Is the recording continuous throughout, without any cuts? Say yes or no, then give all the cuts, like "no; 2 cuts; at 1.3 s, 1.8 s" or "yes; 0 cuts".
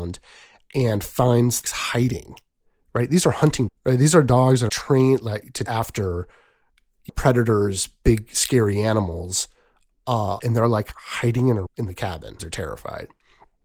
no; 8 cuts; at 1.6 s, 3.7 s, 4.7 s, 5.7 s, 7.1 s, 10.4 s, 11.7 s, 12.4 s